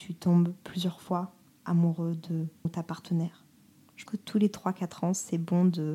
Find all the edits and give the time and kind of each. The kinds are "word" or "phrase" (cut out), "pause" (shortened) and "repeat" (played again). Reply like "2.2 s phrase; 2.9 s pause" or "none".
2.6 s word; 4.1 s word